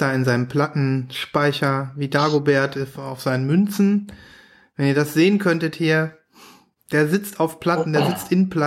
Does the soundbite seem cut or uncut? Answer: uncut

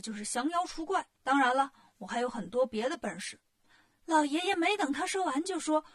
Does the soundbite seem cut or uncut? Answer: cut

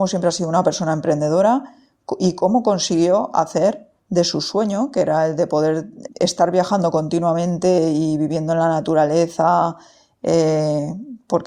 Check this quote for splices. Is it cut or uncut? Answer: cut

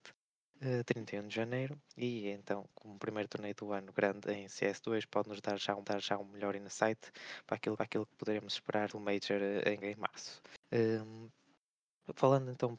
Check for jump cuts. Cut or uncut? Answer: cut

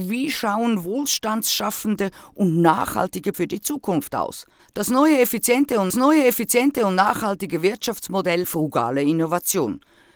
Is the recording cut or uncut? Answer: cut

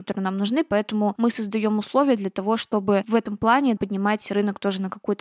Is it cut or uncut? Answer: uncut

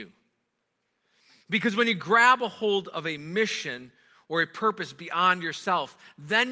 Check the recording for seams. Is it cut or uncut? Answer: uncut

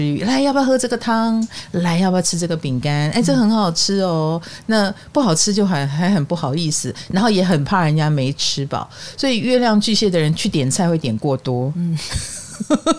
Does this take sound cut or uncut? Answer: uncut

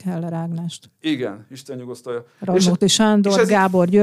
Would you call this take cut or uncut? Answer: uncut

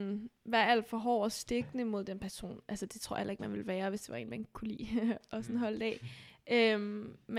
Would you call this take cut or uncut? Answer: uncut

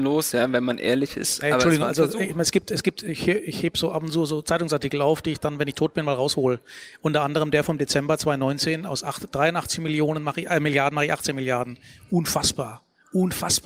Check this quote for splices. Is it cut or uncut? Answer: uncut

